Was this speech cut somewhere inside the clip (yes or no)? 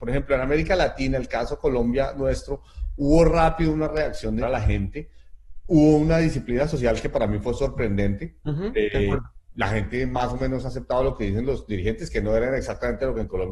yes